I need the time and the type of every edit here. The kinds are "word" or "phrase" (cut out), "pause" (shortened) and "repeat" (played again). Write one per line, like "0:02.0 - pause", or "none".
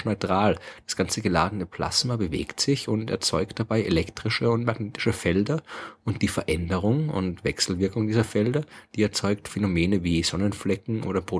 none